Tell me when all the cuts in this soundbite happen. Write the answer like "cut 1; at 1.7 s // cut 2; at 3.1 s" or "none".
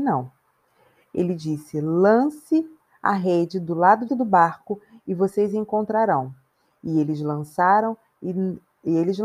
cut 1; at 4.1 s